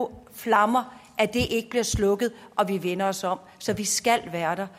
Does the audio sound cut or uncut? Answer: uncut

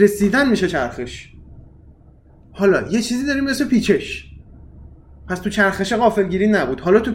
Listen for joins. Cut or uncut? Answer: uncut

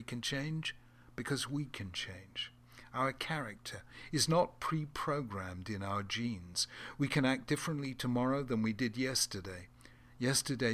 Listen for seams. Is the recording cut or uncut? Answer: uncut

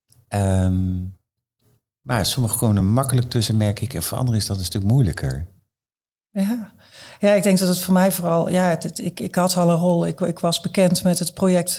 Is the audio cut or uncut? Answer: uncut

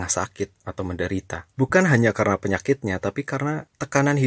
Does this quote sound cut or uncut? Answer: cut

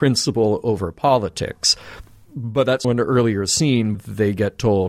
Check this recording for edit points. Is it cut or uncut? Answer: cut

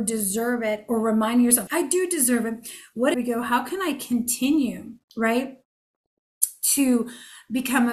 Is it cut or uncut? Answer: cut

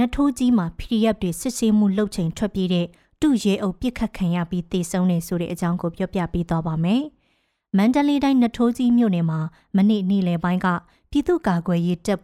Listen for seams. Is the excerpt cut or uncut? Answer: uncut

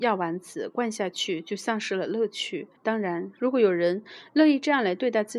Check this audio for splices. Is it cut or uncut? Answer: cut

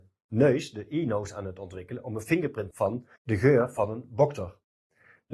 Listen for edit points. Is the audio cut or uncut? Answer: cut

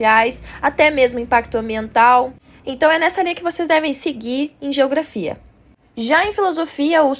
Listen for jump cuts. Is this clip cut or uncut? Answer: uncut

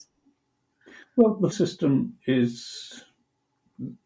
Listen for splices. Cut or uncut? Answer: cut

